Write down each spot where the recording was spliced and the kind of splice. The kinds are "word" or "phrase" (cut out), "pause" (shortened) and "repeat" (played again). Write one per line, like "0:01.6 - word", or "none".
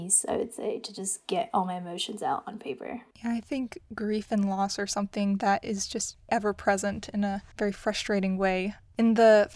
0:03.1 - pause
0:07.5 - pause